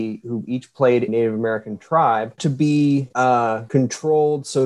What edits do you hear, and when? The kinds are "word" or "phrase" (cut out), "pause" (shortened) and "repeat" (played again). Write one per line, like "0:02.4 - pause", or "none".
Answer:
0:01.1 - word
0:02.4 - word

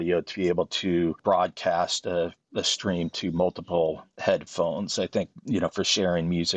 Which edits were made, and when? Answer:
0:02.6 - word

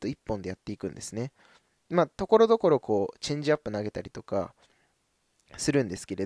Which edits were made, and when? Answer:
none

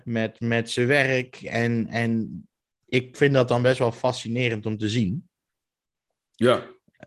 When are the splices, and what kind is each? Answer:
none

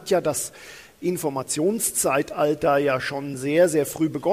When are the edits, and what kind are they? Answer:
none

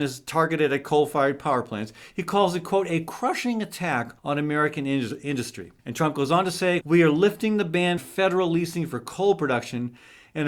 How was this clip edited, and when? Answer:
0:04.2 - pause
0:05.8 - pause
0:06.8 - word
0:08.0 - word

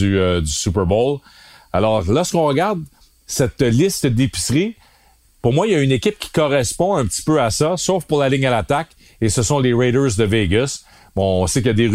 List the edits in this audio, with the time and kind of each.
none

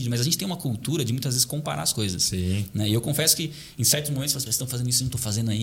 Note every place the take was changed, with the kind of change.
0:04.5 - word

